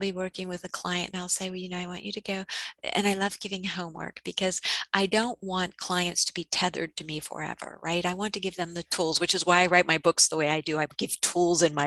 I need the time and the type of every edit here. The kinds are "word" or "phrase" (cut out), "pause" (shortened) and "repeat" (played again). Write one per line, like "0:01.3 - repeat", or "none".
none